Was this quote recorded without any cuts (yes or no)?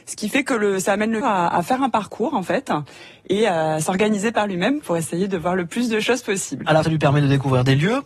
no